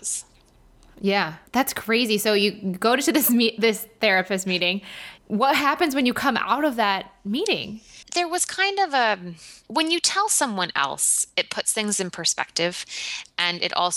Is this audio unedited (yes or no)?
no